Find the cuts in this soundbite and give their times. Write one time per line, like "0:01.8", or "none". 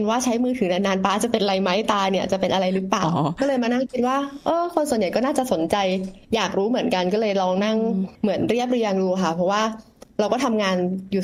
0:06.2
0:08.1